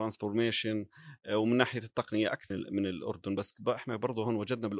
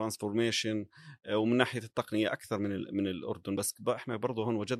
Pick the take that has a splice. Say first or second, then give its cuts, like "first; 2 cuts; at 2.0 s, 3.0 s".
first; 1 cut; at 2.5 s